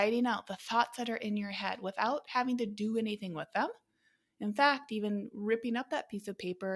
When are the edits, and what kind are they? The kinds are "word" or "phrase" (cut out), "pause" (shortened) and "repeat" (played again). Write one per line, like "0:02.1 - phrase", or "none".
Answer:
none